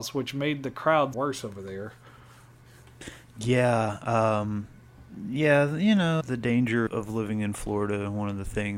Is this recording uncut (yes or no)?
no